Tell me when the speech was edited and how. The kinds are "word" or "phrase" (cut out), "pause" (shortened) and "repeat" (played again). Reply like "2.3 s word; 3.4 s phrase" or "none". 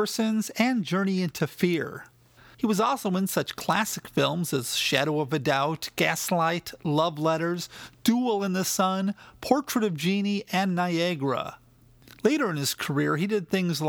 none